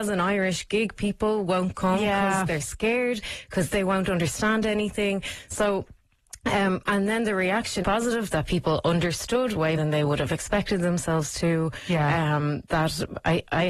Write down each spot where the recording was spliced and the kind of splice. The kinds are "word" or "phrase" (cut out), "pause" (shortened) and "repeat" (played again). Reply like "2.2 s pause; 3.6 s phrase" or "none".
3.7 s phrase; 7.8 s phrase; 9.8 s word